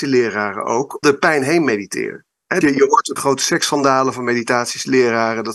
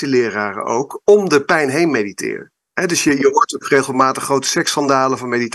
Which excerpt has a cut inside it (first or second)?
first